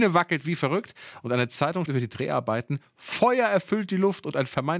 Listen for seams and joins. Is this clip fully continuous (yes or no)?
no